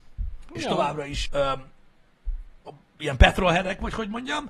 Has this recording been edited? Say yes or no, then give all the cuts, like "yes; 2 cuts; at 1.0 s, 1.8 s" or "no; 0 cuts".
yes; 2 cuts; at 1.3 s, 2.6 s